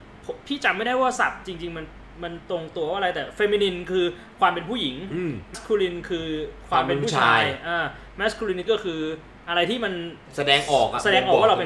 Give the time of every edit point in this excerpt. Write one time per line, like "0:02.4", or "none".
0:05.5
0:08.7